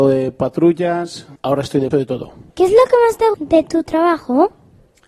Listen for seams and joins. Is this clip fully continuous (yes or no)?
no